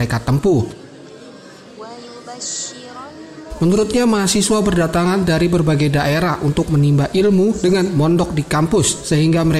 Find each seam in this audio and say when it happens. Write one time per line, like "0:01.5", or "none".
none